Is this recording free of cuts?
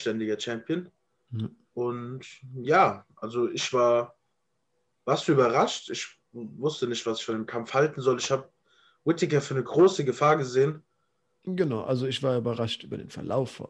yes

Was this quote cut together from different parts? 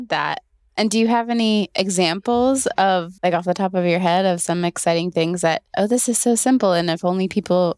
yes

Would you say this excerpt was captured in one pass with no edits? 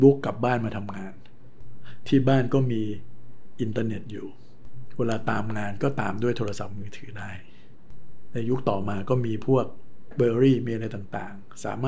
no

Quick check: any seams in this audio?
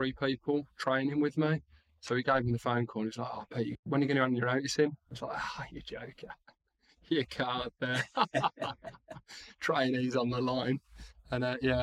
no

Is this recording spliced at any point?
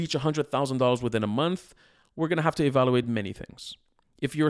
no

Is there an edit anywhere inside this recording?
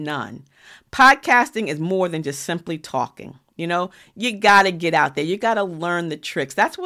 no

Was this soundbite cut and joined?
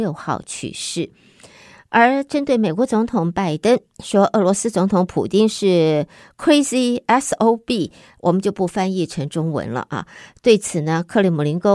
no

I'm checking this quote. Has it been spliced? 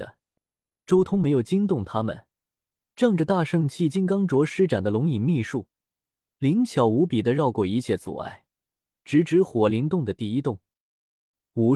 no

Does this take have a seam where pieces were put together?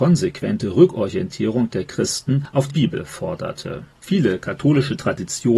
yes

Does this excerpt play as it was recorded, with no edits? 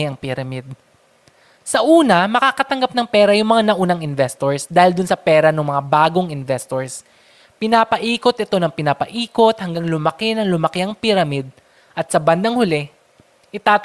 yes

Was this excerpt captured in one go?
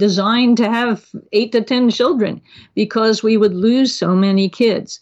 yes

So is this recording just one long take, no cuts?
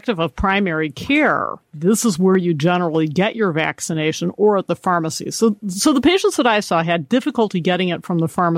yes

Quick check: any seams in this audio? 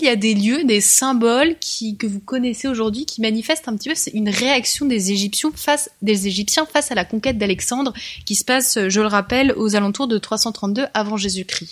no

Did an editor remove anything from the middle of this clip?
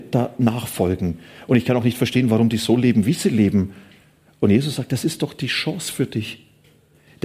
no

